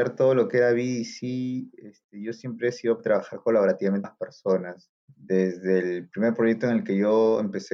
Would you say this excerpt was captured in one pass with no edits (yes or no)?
no